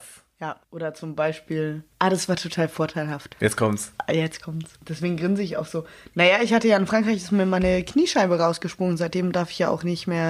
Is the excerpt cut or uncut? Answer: uncut